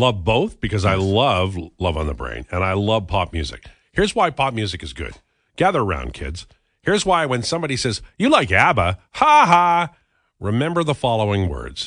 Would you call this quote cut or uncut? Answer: uncut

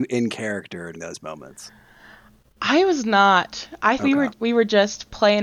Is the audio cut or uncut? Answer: cut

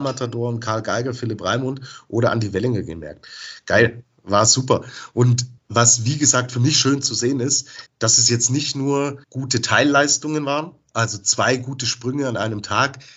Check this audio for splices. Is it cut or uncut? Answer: cut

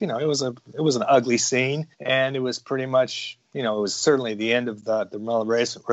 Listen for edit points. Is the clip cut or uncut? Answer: cut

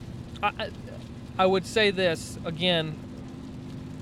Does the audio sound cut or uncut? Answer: uncut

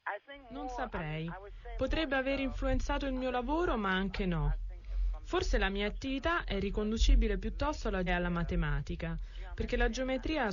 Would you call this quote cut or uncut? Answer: cut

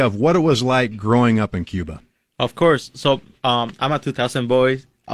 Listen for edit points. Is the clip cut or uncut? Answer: uncut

